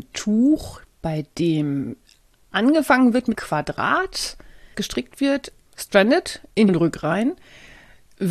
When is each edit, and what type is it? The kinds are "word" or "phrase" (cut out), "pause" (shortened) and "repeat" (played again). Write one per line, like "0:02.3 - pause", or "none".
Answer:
0:03.3 - word
0:04.7 - word
0:05.7 - word
0:06.7 - word